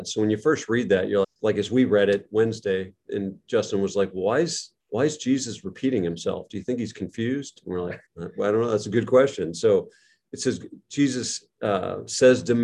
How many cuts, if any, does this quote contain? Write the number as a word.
three